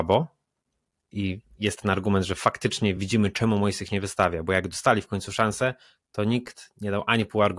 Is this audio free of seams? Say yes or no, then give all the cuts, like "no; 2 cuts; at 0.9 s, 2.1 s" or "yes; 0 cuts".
yes; 0 cuts